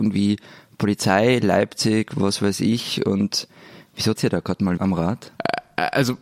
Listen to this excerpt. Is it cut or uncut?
cut